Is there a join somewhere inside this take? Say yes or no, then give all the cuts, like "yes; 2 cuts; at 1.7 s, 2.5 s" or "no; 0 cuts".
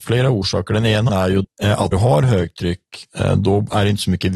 yes; 3 cuts; at 1.1 s, 1.4 s, 1.9 s